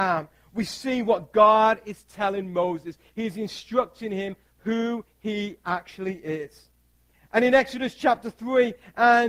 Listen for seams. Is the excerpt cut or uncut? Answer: uncut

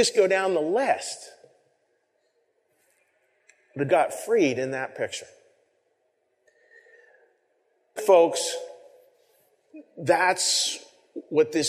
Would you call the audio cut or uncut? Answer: cut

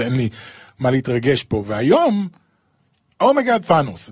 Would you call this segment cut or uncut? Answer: uncut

